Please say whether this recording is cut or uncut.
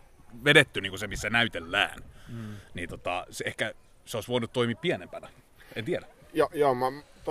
uncut